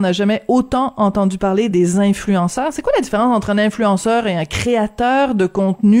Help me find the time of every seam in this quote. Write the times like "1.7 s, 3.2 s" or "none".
none